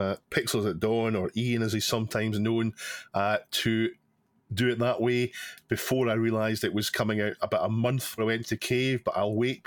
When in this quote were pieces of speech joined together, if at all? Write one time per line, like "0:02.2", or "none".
0:08.2